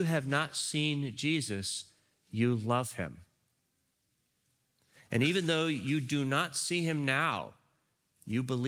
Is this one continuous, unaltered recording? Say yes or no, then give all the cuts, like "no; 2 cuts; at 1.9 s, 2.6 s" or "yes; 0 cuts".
yes; 0 cuts